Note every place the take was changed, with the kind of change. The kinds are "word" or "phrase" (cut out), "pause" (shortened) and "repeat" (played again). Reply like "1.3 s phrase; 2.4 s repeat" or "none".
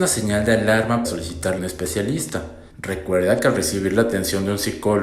1.0 s word; 1.6 s phrase; 2.7 s pause